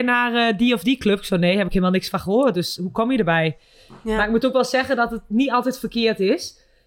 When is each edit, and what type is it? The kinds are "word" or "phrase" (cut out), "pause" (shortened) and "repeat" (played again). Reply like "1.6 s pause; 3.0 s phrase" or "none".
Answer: none